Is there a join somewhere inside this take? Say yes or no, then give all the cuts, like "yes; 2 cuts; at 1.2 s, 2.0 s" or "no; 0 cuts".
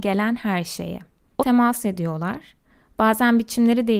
yes; 1 cut; at 1.4 s